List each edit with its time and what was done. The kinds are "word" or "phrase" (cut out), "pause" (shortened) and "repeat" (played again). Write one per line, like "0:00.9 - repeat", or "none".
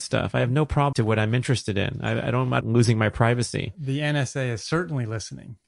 0:00.9 - phrase
0:02.6 - phrase